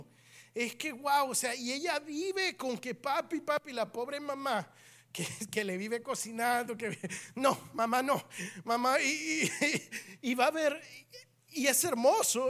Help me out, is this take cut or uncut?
uncut